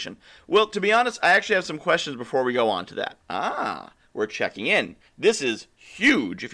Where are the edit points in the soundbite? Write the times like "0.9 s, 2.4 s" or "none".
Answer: 3.2 s, 5.1 s